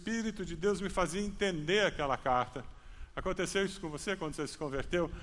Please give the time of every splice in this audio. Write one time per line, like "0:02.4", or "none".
none